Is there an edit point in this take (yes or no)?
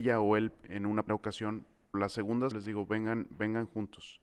yes